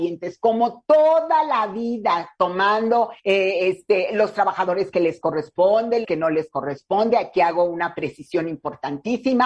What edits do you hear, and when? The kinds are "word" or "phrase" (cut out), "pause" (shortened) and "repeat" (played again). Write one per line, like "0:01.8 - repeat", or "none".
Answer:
0:03.2 - pause
0:06.0 - word